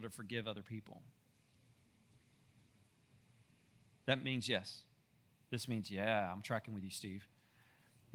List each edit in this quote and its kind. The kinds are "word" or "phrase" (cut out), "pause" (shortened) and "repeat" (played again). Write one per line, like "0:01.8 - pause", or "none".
none